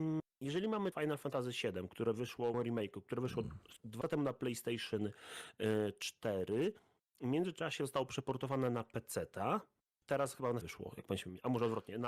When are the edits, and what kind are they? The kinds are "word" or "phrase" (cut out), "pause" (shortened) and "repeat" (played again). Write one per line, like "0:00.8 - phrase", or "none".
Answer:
0:00.9 - word
0:02.5 - word
0:04.0 - word
0:10.6 - word